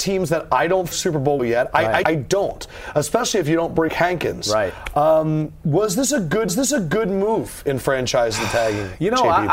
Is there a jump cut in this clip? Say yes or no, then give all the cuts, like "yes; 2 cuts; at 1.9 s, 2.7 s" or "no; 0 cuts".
yes; 5 cuts; at 0.9 s, 1.4 s, 2.0 s, 3.9 s, 6.5 s